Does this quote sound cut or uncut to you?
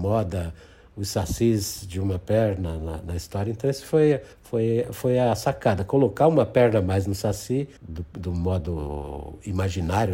cut